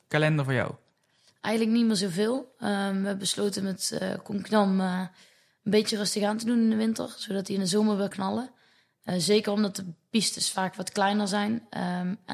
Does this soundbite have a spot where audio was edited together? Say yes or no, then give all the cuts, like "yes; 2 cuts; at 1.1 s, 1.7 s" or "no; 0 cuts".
yes; 1 cut; at 8.1 s